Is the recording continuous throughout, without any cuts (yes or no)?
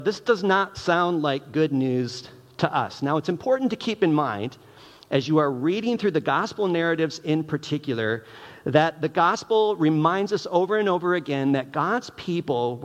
yes